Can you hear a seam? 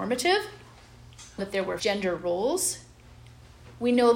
yes; 2 cuts; at 1.4 s, 1.8 s

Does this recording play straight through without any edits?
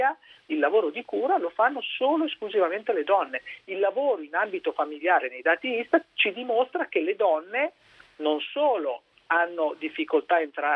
yes; 0 cuts

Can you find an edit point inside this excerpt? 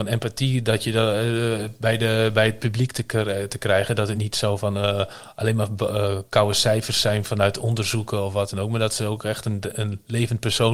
no; 0 cuts

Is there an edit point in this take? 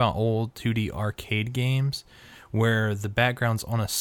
no; 0 cuts

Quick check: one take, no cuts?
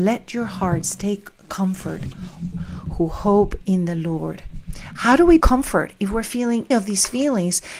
no; 3 cuts; at 2.5 s, 5.4 s, 6.7 s

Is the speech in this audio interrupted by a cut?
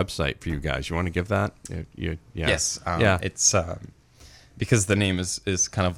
no; 0 cuts

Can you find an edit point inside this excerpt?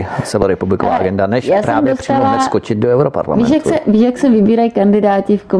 no; 0 cuts

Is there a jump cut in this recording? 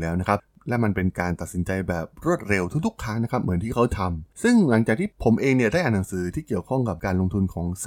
yes; 1 cut; at 4.3 s

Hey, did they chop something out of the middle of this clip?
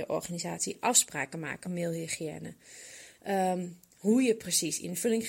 yes; 1 cut; at 1.6 s

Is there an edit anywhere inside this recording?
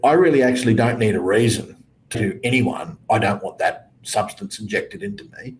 yes; 1 cut; at 2.1 s

